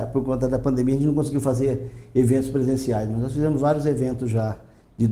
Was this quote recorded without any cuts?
yes; 0 cuts

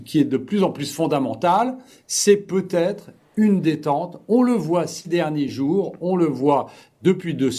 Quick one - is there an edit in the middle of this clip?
no; 0 cuts

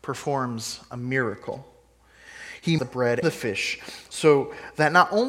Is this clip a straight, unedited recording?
no; 2 cuts; at 2.8 s, 3.2 s

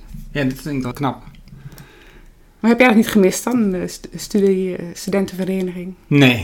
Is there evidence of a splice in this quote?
yes; 1 cut; at 0.9 s

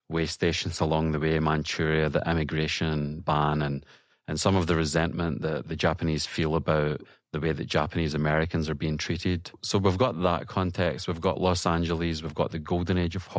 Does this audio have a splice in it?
no; 0 cuts

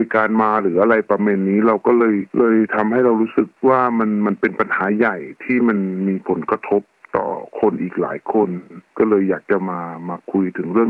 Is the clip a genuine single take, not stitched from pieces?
no; 2 cuts; at 2.3 s, 3.6 s

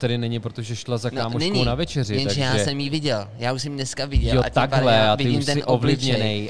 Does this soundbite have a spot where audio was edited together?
no; 0 cuts

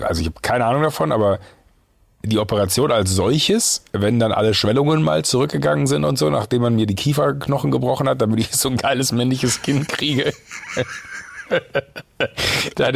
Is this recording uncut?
yes; 0 cuts

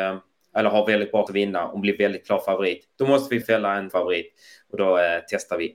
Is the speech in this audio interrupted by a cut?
yes; 3 cuts; at 1.3 s, 3.4 s, 3.9 s

